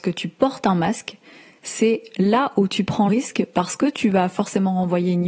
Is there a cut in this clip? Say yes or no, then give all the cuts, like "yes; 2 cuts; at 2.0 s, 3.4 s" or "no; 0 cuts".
yes; 1 cut; at 3.1 s